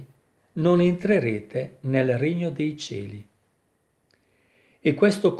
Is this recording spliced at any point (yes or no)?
no